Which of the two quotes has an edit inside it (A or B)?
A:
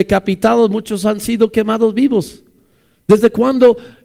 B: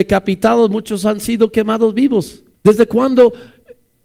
B